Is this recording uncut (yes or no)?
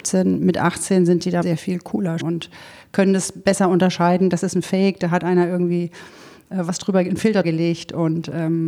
no